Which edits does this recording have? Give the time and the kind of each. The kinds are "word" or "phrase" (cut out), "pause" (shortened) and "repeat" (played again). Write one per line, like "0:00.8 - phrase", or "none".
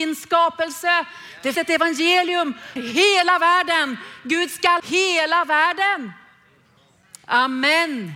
0:01.5 - word
0:02.8 - word
0:04.8 - word